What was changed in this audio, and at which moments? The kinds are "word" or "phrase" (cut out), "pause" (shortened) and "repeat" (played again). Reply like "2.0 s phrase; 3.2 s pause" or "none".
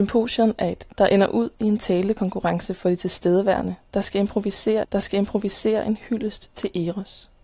0.9 s word; 4.8 s repeat

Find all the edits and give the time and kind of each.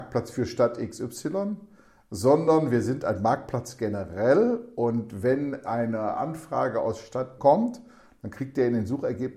7.4 s word

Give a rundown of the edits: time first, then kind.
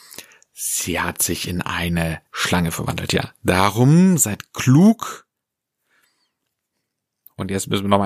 2.3 s pause

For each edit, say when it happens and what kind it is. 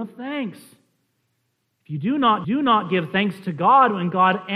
2.4 s repeat

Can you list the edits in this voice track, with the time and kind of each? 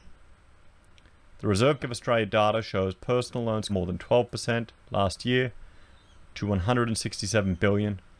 1.8 s word; 3.7 s word

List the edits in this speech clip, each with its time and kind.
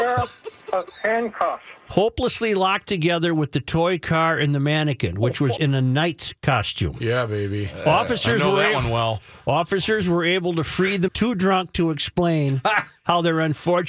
5.6 s word; 11.1 s phrase

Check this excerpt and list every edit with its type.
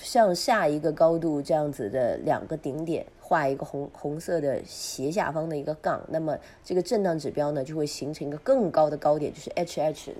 3.2 s pause

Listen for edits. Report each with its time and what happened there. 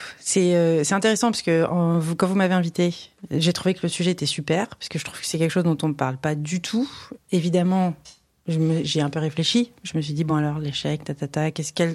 none

